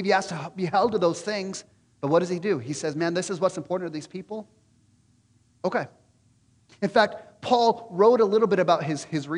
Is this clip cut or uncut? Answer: uncut